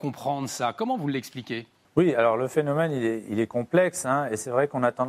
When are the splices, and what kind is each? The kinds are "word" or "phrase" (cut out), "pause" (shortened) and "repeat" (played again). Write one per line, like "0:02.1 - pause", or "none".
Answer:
none